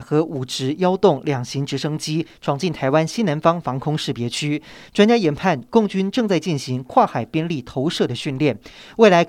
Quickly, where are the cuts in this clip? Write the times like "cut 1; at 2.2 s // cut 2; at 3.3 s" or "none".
none